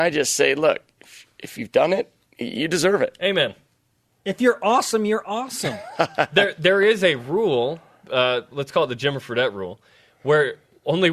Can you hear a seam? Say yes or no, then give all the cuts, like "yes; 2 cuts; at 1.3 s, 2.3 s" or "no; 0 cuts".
no; 0 cuts